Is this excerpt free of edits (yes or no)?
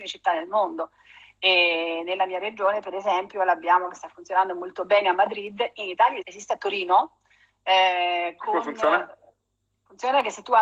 no